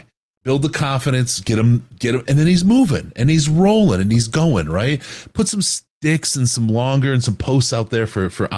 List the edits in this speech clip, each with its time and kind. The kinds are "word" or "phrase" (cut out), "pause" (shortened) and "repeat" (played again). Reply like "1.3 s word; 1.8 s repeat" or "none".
2.3 s word